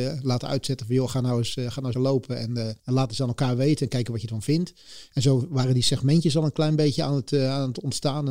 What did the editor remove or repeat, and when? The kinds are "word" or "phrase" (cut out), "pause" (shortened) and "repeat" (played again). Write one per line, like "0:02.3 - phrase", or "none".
0:01.9 - word
0:02.8 - pause